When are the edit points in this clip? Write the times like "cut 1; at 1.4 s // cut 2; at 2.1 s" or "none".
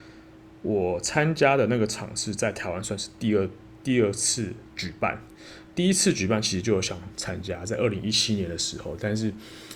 cut 1; at 5.7 s